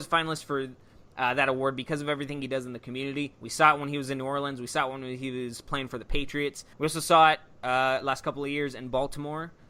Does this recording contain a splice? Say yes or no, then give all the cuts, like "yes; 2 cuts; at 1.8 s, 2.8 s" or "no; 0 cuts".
yes; 1 cut; at 6.7 s